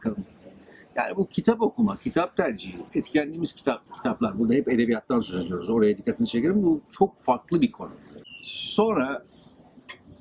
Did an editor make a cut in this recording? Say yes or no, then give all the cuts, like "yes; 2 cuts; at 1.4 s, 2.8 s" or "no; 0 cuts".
yes; 2 cuts; at 2.9 s, 3.9 s